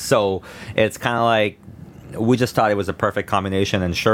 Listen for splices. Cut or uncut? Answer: uncut